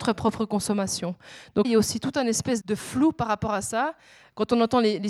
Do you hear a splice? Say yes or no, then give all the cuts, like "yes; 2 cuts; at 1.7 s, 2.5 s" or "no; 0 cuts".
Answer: yes; 2 cuts; at 1.6 s, 2.6 s